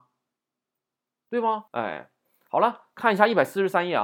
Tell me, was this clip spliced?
yes; 1 cut; at 1.7 s

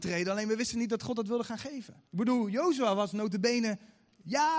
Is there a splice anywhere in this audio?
yes; 1 cut; at 2.1 s

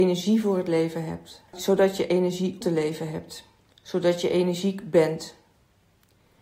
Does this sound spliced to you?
yes; 3 cuts; at 1.5 s, 2.6 s, 3.7 s

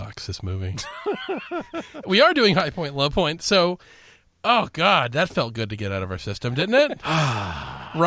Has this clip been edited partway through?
yes; 1 cut; at 2.0 s

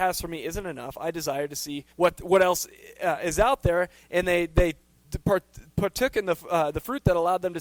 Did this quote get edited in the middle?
yes; 1 cut; at 1.9 s

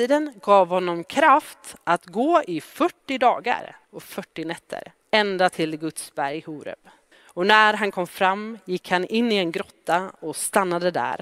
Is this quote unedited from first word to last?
no; 3 cuts; at 3.8 s, 5.0 s, 7.1 s

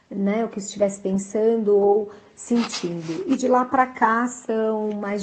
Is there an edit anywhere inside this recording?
no; 0 cuts

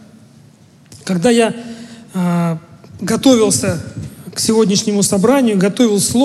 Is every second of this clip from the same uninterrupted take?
yes; 0 cuts

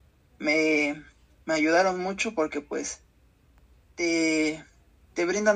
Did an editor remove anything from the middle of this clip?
no; 0 cuts

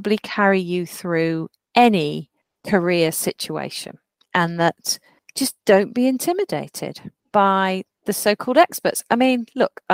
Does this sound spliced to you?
no; 0 cuts

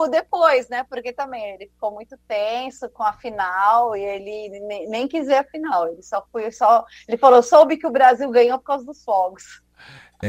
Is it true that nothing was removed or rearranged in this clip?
yes; 0 cuts

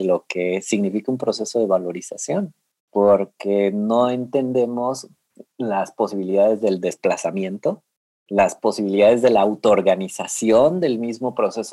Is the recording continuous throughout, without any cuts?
yes; 0 cuts

